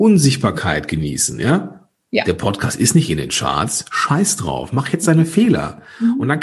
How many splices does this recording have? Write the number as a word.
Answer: zero